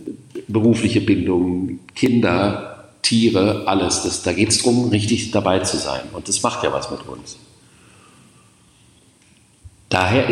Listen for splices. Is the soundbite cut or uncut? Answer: uncut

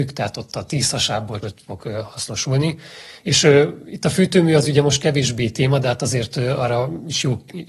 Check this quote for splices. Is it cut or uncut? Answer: cut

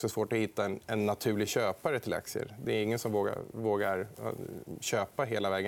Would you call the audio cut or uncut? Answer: uncut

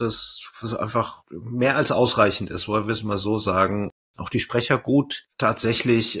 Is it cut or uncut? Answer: cut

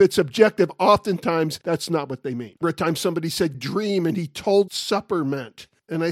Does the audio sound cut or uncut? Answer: cut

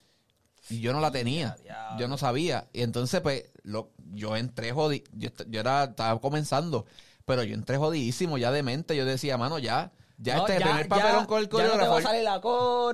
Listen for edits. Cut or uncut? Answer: uncut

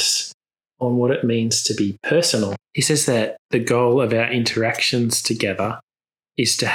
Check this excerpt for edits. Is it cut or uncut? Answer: cut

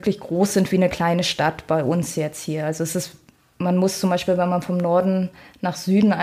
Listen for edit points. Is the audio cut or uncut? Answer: uncut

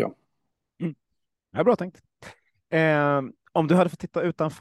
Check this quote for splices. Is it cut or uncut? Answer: uncut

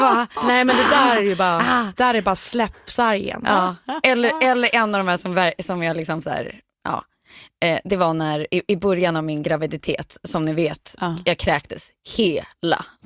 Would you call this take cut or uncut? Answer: uncut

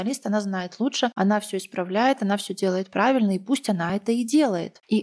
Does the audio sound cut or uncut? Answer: uncut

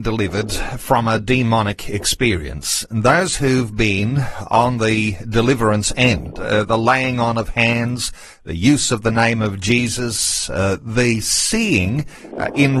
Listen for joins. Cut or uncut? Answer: uncut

